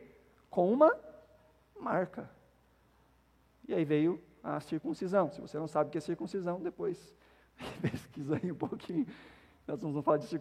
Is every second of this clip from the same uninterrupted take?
yes; 0 cuts

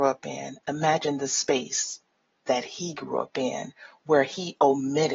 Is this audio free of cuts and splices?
yes; 0 cuts

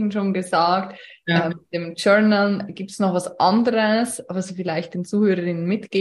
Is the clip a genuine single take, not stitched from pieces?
yes; 0 cuts

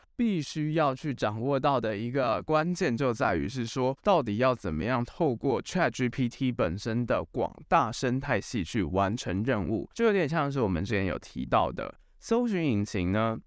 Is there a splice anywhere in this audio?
yes; 2 cuts; at 4.0 s, 9.9 s

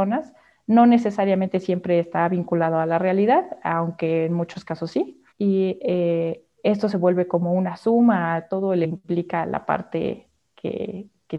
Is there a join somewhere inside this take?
yes; 2 cuts; at 5.3 s, 8.8 s

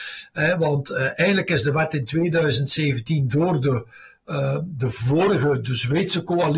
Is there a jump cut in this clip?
no; 0 cuts

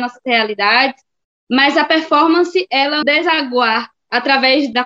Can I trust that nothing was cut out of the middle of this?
no; 1 cut; at 3.0 s

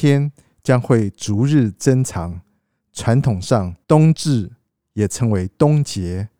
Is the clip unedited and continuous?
no; 1 cut; at 3.8 s

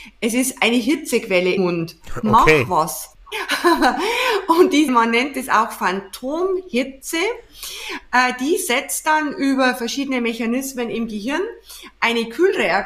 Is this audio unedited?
no; 2 cuts; at 1.6 s, 4.9 s

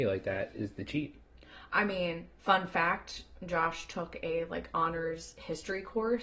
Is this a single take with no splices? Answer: yes; 0 cuts

